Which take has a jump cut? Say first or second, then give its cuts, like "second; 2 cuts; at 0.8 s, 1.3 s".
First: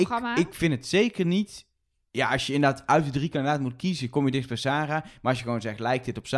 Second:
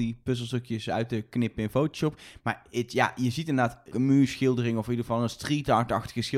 second; 1 cut; at 3.9 s